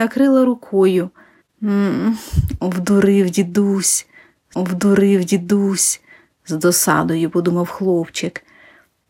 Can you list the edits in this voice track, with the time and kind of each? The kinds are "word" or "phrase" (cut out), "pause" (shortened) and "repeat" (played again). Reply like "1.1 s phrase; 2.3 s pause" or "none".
1.4 s pause; 4.5 s repeat